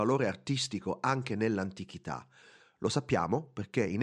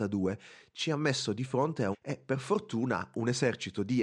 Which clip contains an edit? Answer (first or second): second